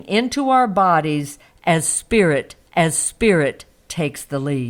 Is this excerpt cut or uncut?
cut